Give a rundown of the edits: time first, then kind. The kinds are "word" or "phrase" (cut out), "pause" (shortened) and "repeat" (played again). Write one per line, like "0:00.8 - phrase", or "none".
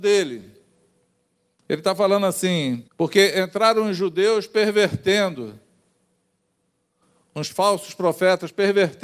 0:02.9 - pause